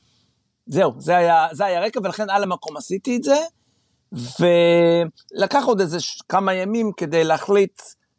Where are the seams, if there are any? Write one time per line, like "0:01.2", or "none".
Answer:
none